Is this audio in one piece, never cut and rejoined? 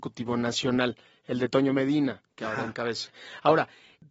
yes; 0 cuts

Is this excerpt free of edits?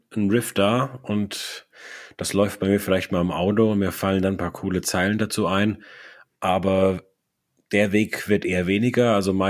yes; 0 cuts

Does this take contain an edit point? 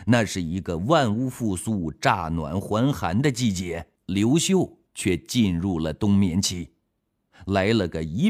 yes; 2 cuts; at 4.0 s, 4.9 s

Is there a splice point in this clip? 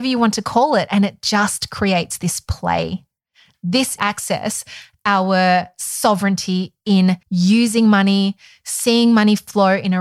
yes; 2 cuts; at 4.0 s, 7.2 s

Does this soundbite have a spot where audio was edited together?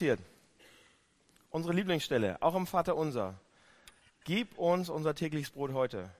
no; 0 cuts

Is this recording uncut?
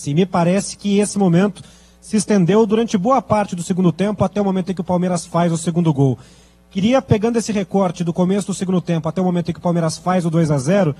yes; 0 cuts

